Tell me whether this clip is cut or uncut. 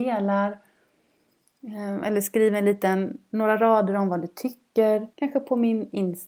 cut